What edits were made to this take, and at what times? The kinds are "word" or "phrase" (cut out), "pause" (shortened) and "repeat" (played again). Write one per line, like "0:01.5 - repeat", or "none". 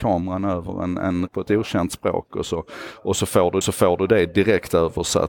0:01.3 - word
0:03.6 - repeat